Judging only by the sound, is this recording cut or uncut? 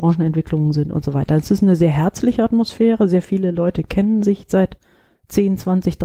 uncut